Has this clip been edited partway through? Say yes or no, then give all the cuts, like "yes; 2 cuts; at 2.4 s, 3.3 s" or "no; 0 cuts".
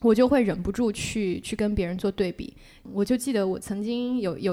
no; 0 cuts